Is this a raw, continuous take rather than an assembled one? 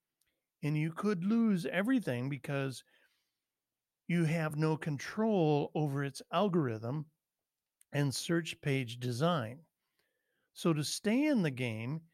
yes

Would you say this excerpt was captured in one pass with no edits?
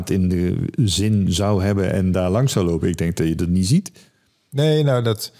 yes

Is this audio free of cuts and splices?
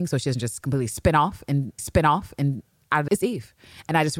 no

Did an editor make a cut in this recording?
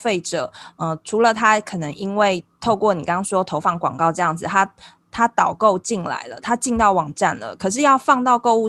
no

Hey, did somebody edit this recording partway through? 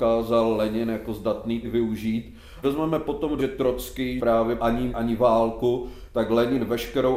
yes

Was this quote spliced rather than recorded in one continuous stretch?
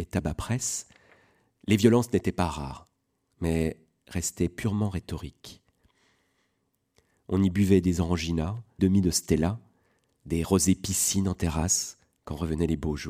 yes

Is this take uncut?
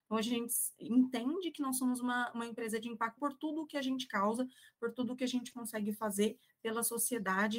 no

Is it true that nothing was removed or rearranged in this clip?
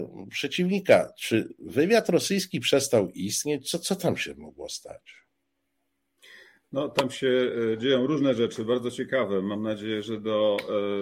yes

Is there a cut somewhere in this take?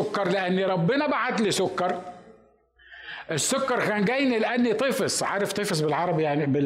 no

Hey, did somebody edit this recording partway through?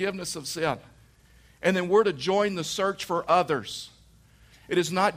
no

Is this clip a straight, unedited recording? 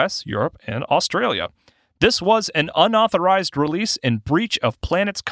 yes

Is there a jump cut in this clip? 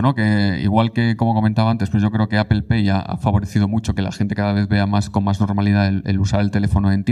no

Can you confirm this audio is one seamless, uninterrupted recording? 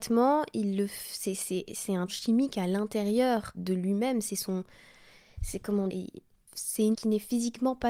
no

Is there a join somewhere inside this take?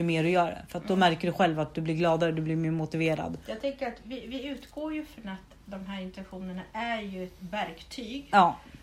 no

